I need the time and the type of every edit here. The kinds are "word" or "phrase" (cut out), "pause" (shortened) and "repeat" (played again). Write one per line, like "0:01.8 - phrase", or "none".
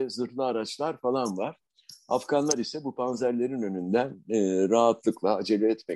none